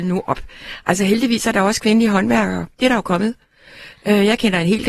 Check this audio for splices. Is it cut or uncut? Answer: cut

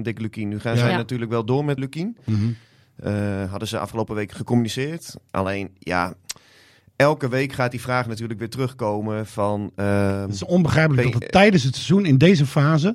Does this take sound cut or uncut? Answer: cut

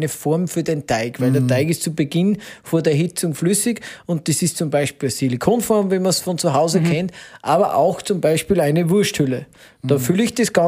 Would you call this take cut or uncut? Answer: uncut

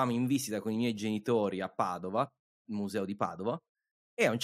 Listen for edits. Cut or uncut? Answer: uncut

